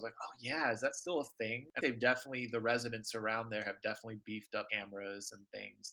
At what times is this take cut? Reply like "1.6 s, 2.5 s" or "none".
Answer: 1.8 s, 4.7 s

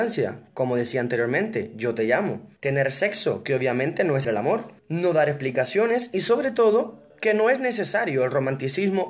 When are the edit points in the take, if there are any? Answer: 2.6 s, 4.2 s, 4.8 s, 7.1 s

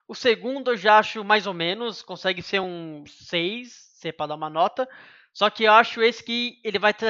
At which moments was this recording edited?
none

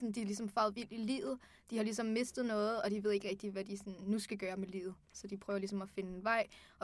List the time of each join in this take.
none

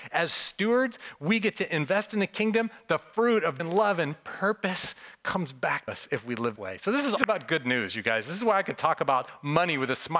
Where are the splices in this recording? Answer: 3.6 s, 5.9 s, 6.6 s, 7.2 s

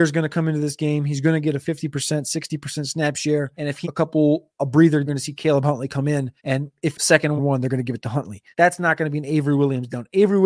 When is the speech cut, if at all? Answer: 3.8 s, 5.1 s, 6.4 s, 6.9 s, 7.4 s, 8.5 s

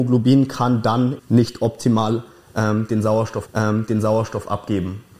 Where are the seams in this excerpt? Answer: 1.2 s, 3.5 s

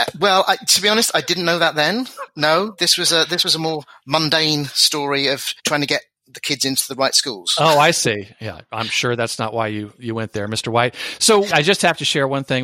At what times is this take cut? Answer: 5.6 s

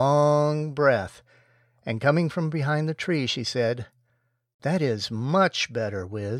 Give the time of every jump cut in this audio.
none

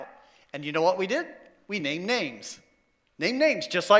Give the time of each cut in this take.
none

